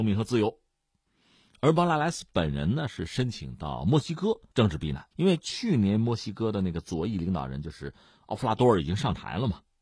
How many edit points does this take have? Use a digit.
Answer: 2